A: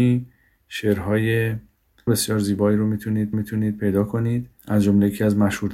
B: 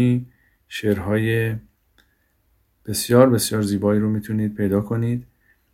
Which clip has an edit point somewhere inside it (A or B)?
A